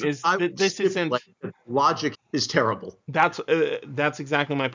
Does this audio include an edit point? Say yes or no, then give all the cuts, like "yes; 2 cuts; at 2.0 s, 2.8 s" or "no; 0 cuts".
yes; 1 cut; at 2.1 s